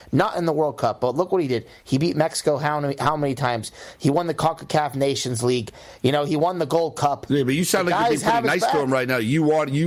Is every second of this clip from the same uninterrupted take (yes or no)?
yes